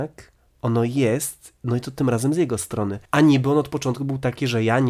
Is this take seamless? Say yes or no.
no